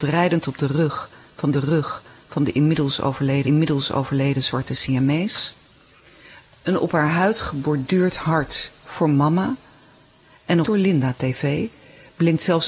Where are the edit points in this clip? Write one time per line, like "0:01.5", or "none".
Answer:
0:01.5
0:03.4
0:10.6